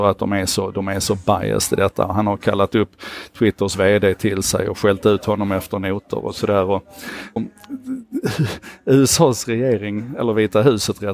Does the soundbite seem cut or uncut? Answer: cut